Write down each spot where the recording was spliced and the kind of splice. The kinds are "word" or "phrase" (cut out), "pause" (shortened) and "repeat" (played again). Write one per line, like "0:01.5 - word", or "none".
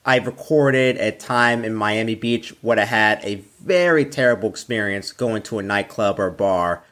none